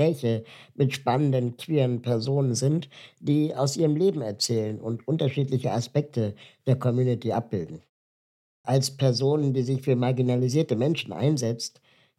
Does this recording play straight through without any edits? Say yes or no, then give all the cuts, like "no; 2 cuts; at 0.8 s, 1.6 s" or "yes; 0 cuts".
no; 1 cut; at 8.6 s